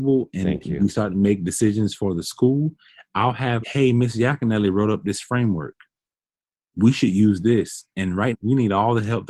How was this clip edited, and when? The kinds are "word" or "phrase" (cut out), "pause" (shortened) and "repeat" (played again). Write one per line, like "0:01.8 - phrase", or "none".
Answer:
0:03.6 - word
0:08.3 - word